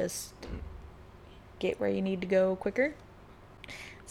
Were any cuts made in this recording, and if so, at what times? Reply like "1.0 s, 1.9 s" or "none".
none